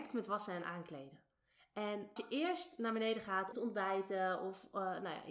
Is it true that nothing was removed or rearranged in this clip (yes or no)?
no